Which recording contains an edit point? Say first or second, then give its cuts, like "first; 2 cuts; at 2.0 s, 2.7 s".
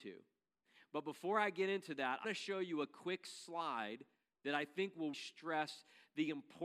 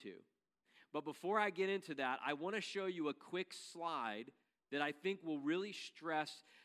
first; 2 cuts; at 2.2 s, 5.1 s